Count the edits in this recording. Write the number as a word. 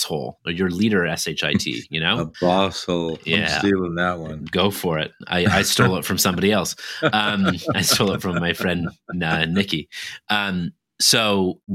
zero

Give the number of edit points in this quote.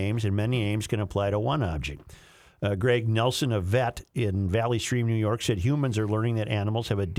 zero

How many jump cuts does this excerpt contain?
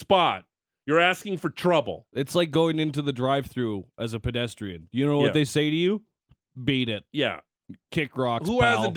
zero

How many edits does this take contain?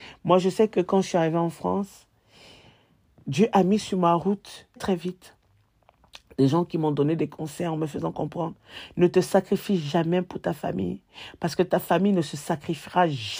one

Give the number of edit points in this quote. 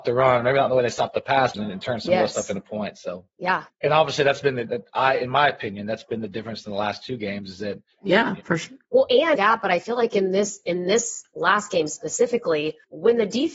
two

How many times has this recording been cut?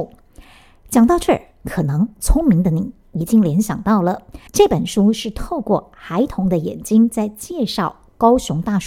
one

